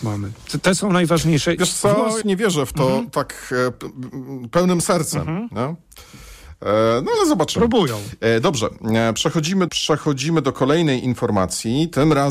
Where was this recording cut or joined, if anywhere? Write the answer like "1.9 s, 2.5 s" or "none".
2.2 s, 3.7 s, 9.7 s